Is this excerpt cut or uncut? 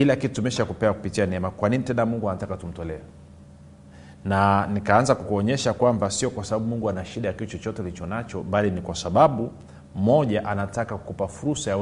uncut